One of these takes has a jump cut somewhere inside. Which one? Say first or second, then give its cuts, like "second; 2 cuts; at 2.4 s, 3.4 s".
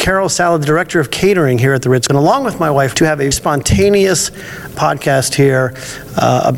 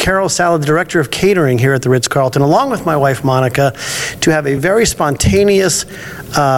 first; 4 cuts; at 2.1 s, 2.9 s, 3.3 s, 4.8 s